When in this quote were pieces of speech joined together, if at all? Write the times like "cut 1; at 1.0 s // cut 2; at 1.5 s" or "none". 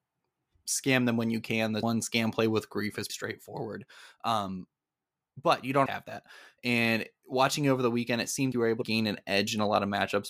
cut 1; at 1.8 s // cut 2; at 3.1 s // cut 3; at 5.9 s // cut 4; at 8.5 s // cut 5; at 8.8 s